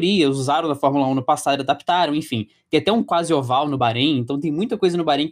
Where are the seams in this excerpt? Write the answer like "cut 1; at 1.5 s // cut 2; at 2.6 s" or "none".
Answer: none

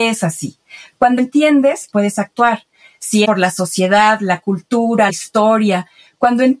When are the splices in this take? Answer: cut 1; at 1.2 s // cut 2; at 1.9 s // cut 3; at 3.2 s // cut 4; at 5.1 s

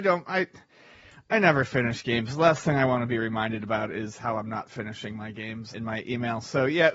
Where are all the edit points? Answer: cut 1; at 5.7 s

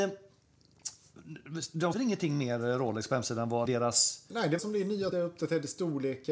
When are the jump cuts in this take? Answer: cut 1; at 1.9 s // cut 2; at 3.7 s // cut 3; at 4.6 s // cut 4; at 5.1 s

